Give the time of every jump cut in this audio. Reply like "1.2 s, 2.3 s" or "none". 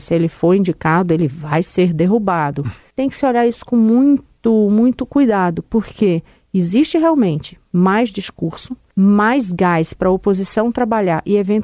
none